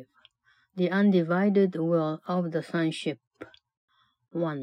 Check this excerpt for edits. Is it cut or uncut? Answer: uncut